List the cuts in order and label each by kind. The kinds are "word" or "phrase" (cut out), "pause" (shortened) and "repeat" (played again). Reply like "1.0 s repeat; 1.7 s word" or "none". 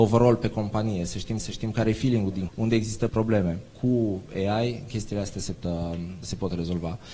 1.4 s repeat; 2.5 s word; 3.1 s word; 3.7 s pause; 5.5 s word; 6.2 s word